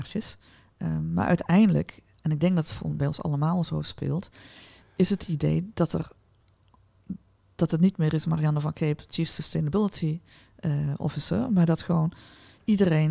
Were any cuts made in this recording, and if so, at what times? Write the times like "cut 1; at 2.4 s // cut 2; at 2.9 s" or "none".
none